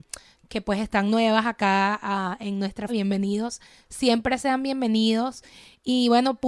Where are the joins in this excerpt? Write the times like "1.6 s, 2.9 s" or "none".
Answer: 2.9 s